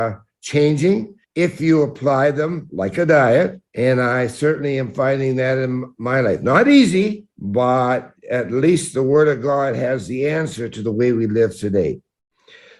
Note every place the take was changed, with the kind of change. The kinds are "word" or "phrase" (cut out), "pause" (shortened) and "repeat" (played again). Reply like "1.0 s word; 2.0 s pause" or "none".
1.2 s pause; 3.7 s pause; 7.3 s pause